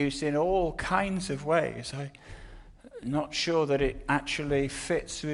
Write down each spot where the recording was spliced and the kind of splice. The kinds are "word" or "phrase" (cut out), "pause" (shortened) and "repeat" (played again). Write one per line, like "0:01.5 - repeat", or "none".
none